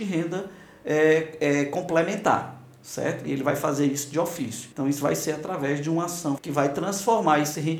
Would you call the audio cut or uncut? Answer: cut